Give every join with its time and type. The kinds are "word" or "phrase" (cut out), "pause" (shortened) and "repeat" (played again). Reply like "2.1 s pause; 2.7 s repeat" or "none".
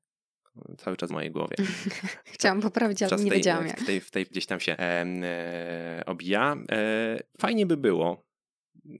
1.1 s word; 3.1 s word; 3.8 s word; 4.3 s word; 4.7 s word; 7.3 s word